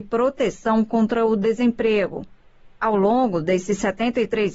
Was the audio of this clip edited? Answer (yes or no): no